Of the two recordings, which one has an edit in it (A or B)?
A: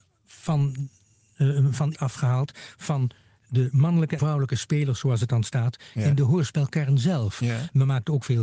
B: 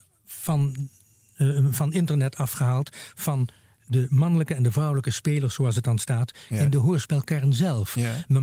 A